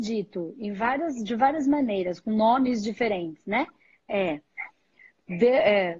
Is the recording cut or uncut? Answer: uncut